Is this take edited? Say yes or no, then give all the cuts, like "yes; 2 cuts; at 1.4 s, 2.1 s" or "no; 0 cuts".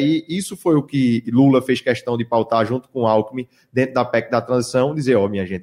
no; 0 cuts